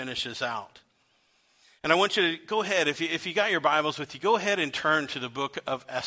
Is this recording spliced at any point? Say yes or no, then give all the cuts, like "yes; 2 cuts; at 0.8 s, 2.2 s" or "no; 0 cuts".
no; 0 cuts